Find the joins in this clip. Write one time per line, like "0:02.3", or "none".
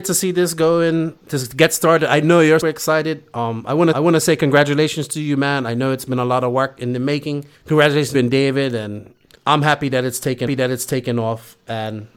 0:02.6
0:03.9
0:07.5
0:08.1
0:09.3
0:10.5